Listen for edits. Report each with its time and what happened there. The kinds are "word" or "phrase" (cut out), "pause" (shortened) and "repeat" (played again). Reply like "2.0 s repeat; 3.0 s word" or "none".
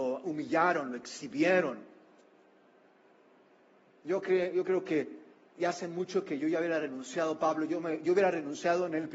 none